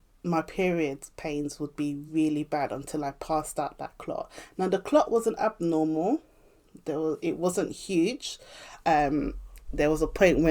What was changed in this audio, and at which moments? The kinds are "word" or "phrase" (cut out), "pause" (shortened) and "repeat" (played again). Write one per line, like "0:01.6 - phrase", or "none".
none